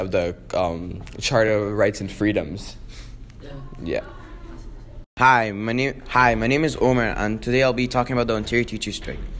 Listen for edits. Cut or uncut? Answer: uncut